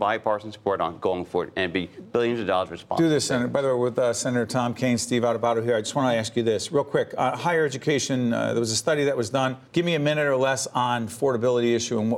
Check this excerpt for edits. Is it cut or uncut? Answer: cut